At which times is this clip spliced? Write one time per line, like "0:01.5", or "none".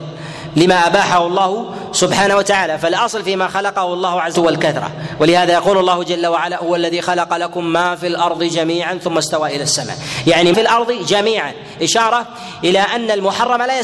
0:04.3
0:10.5